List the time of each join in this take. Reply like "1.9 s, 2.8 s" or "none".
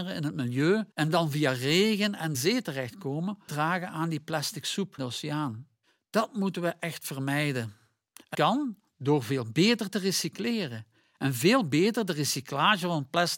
0.9 s, 2.3 s, 3.5 s, 5.0 s, 5.8 s, 8.3 s